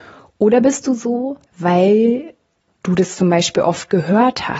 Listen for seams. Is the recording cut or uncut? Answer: cut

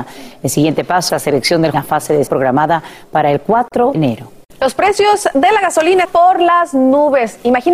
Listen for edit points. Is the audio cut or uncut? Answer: cut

